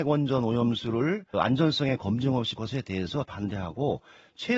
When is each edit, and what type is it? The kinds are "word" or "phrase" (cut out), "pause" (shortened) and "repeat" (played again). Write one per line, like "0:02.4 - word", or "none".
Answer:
0:01.3 - word
0:02.6 - word
0:03.2 - word